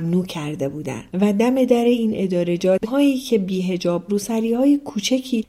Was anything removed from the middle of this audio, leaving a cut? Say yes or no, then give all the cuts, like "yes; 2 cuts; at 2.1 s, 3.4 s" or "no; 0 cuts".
yes; 3 cuts; at 1.1 s, 2.8 s, 4.1 s